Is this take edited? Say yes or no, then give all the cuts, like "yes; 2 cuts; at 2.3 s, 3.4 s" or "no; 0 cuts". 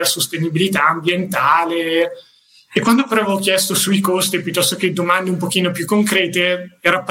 no; 0 cuts